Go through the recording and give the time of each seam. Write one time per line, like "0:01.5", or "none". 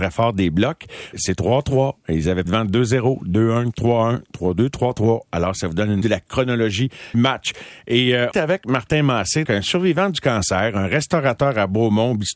0:01.1
0:02.5
0:06.0
0:07.1
0:08.3
0:09.4